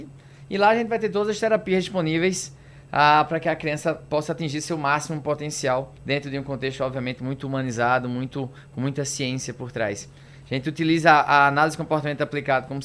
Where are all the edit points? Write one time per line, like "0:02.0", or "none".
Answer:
0:06.0